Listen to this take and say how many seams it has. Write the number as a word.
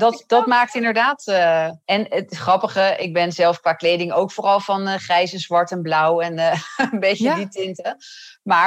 one